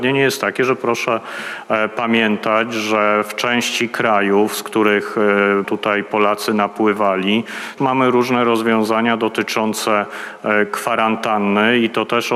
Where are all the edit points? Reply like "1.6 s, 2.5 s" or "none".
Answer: 5.6 s, 7.8 s